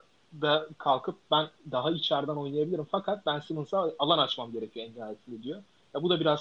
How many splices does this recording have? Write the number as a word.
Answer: zero